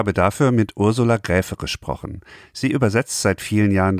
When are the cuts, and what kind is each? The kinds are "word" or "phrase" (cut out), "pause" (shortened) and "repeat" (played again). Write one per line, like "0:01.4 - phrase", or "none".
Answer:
none